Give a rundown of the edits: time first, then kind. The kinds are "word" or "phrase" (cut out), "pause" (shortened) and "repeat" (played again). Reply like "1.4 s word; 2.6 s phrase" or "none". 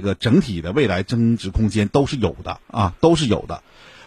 2.6 s pause

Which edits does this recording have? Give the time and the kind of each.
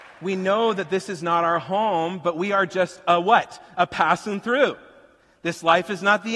none

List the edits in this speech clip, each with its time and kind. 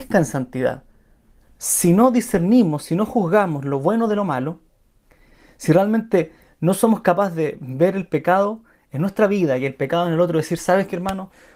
none

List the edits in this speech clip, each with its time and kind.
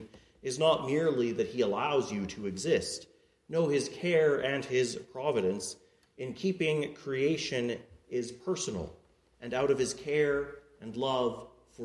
none

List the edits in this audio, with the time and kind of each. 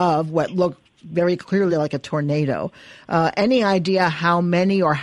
none

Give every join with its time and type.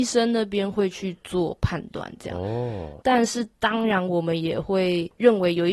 3.0 s word

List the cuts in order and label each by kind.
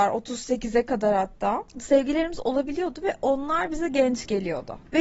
none

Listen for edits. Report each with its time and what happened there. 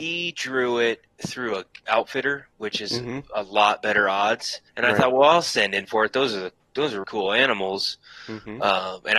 4.7 s pause; 7.0 s word

